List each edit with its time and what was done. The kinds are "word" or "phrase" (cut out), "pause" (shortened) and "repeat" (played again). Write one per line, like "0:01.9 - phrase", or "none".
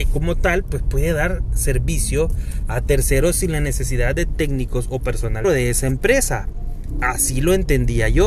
0:04.3 - word
0:05.4 - phrase